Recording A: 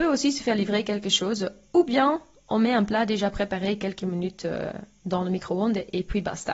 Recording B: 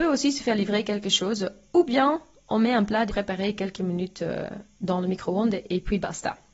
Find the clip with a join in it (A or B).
B